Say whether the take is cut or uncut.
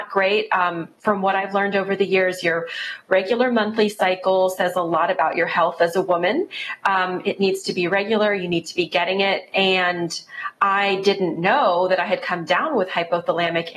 uncut